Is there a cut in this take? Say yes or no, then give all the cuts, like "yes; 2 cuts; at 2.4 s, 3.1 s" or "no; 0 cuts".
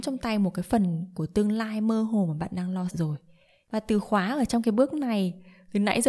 yes; 1 cut; at 2.9 s